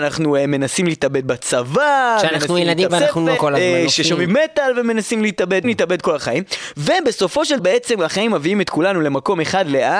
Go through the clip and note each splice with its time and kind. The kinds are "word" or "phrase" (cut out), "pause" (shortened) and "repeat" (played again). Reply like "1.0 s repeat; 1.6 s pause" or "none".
2.9 s word; 3.4 s word; 4.3 s word; 5.6 s word; 7.6 s word